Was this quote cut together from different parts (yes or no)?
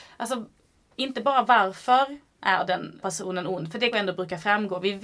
yes